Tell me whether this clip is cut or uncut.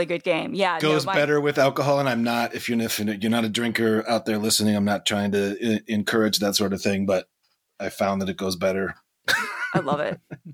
uncut